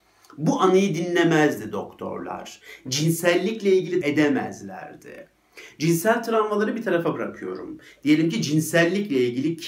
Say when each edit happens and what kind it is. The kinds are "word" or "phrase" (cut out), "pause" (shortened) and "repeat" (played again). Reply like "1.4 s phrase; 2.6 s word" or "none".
4.0 s phrase